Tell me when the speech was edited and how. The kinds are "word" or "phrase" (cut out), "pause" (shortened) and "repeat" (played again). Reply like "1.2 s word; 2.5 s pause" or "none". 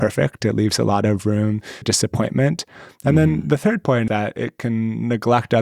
1.8 s word; 4.1 s word